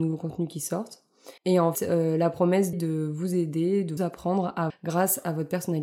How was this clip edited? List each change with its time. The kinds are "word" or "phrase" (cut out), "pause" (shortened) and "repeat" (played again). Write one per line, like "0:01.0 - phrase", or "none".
0:01.4 - pause
0:01.7 - word
0:02.7 - phrase
0:04.0 - word
0:04.7 - word